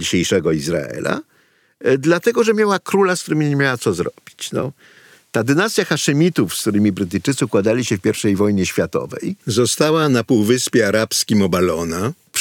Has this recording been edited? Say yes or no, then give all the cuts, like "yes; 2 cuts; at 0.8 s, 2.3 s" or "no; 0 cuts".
no; 0 cuts